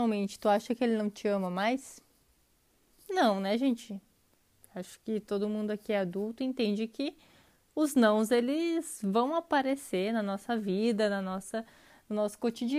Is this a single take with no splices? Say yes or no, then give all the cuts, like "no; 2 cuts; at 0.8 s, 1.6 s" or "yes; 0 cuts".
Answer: yes; 0 cuts